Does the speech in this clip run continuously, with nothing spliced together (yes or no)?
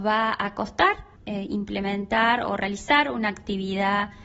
no